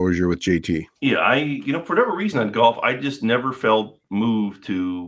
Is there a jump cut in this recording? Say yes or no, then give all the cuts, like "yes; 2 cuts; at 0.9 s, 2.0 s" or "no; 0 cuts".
yes; 1 cut; at 1.0 s